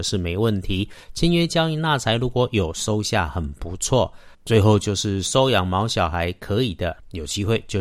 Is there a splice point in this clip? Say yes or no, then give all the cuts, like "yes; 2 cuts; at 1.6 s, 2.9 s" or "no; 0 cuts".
yes; 1 cut; at 4.3 s